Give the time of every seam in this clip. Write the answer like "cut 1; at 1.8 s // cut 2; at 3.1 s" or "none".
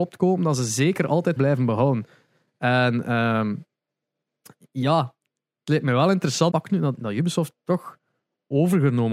cut 1; at 1.4 s // cut 2; at 6.5 s